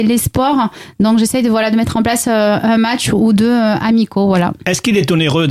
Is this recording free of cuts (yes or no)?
yes